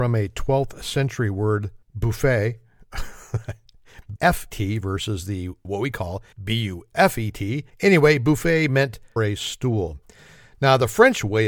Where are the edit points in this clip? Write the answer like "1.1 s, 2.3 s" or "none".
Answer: 1.8 s, 4.2 s, 4.5 s, 5.6 s, 6.3 s, 6.9 s, 7.7 s, 9.2 s